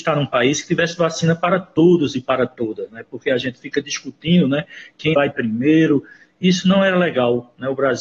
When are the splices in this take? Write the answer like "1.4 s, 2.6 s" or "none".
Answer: 5.1 s